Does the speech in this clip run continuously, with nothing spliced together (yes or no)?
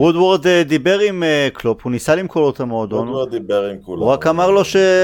yes